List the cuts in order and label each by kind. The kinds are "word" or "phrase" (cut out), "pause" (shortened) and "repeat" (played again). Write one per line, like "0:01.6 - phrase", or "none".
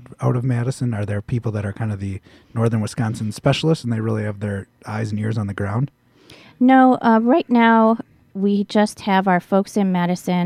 none